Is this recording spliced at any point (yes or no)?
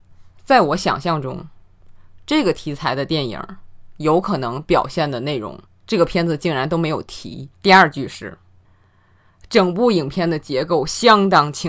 yes